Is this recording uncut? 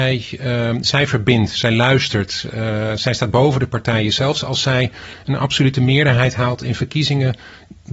yes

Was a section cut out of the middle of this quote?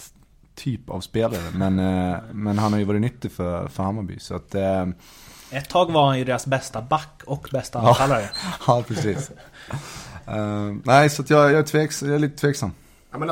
no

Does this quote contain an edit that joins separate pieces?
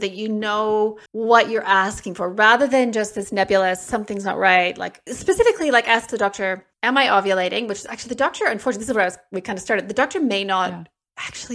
yes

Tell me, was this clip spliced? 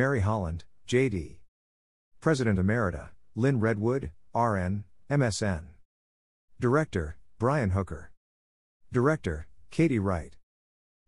no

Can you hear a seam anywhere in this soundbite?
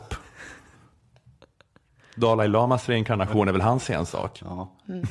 no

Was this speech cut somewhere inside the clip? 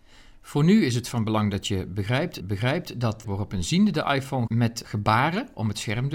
yes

